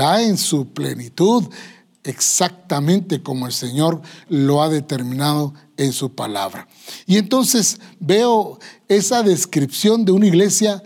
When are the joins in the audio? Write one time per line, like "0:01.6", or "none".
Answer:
none